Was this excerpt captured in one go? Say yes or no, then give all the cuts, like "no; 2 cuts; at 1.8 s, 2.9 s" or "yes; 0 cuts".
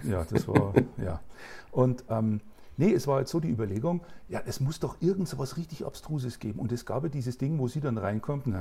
yes; 0 cuts